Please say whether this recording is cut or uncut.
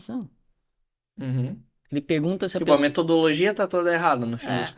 uncut